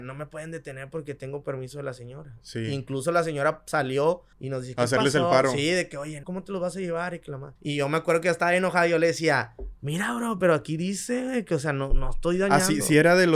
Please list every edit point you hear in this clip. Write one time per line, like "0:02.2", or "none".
0:04.3
0:06.2
0:07.6